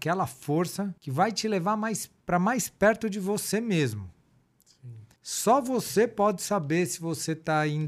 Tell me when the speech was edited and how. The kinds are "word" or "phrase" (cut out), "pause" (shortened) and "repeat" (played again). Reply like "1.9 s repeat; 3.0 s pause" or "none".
1.0 s pause; 2.2 s pause; 5.2 s pause